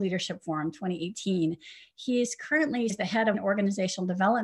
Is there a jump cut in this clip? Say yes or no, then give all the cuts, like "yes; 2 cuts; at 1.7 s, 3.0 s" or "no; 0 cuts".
yes; 2 cuts; at 2.9 s, 3.3 s